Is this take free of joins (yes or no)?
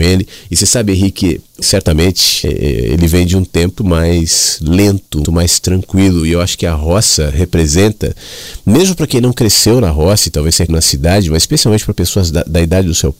no